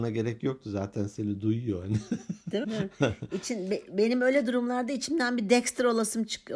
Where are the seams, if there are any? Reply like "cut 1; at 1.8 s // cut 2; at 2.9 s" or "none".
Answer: cut 1; at 2.6 s